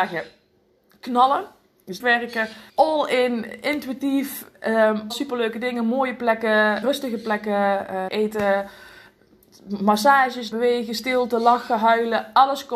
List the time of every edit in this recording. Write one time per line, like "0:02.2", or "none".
0:02.0
0:02.7
0:05.1
0:06.8
0:08.1
0:10.5

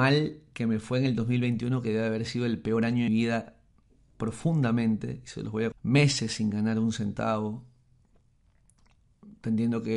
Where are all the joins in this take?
0:03.1
0:05.7

